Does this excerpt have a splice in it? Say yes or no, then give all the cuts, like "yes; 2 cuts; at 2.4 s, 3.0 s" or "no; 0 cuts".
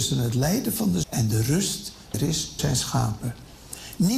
yes; 3 cuts; at 1.0 s, 2.1 s, 2.6 s